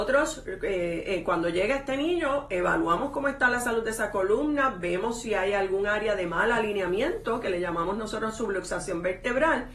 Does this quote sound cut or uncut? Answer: uncut